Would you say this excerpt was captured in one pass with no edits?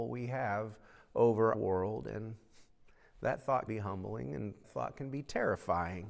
no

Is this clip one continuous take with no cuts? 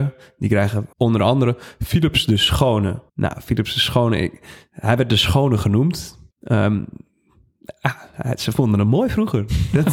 no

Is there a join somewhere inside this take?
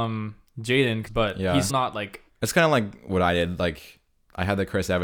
yes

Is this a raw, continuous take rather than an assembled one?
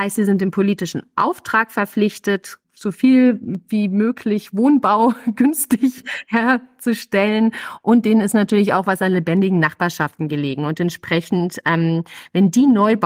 yes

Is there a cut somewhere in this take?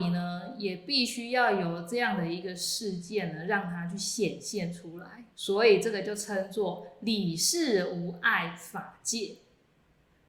yes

